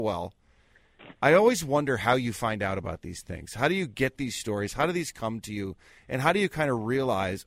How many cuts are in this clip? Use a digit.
0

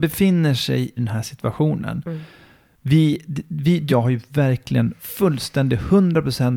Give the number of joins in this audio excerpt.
2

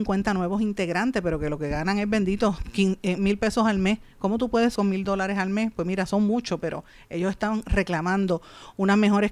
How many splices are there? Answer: 1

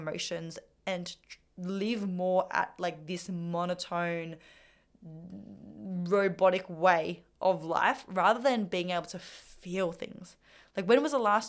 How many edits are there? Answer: 0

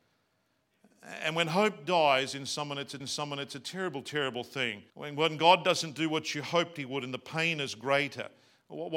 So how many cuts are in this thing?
2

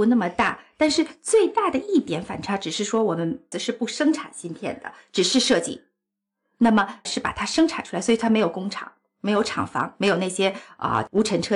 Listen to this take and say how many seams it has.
2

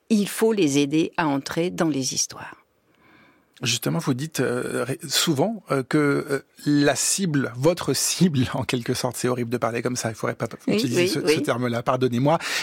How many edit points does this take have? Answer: 0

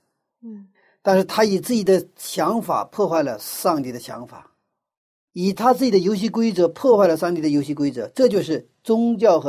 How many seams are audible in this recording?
0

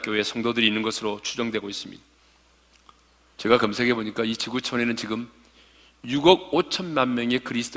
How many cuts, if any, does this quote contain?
0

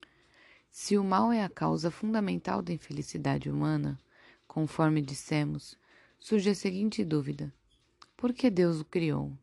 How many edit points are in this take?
0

